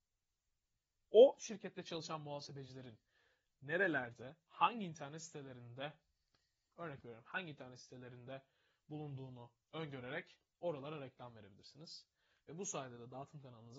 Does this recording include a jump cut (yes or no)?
no